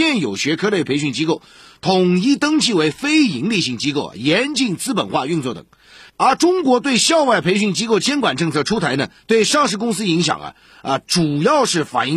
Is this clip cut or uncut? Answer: uncut